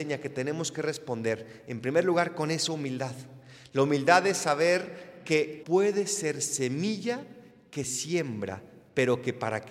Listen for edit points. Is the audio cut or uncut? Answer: cut